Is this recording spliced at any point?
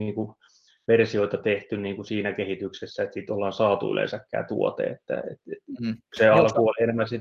yes; 1 cut; at 6.0 s

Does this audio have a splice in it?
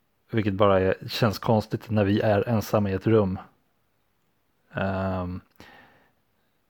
no; 0 cuts

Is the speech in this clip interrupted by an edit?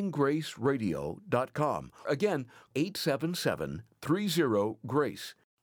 yes; 2 cuts; at 2.0 s, 2.7 s

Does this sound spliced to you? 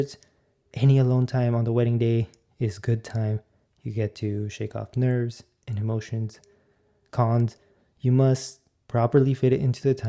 no; 0 cuts

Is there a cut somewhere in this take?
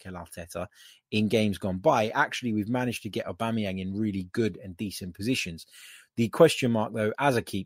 no; 0 cuts

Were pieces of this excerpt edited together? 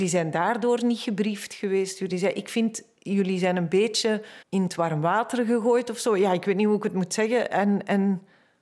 yes; 1 cut; at 4.4 s

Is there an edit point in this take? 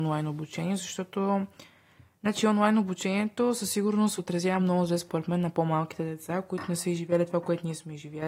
no; 0 cuts

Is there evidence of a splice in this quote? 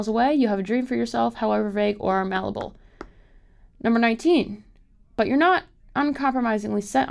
no; 0 cuts

